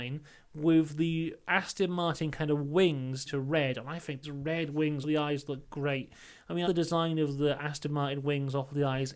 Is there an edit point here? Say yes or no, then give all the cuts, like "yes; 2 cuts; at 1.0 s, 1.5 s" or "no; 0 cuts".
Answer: yes; 4 cuts; at 3.3 s, 4.2 s, 5.0 s, 6.6 s